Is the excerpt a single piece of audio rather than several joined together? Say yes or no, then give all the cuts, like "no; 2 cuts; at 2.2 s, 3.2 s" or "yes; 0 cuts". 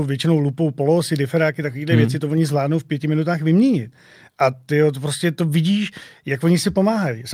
yes; 0 cuts